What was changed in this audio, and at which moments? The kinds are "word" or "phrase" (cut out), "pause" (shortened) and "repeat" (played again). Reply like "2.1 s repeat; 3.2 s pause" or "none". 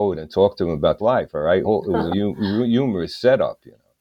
1.0 s phrase; 1.6 s phrase; 2.1 s word